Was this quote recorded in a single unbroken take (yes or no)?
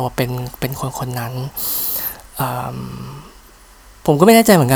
yes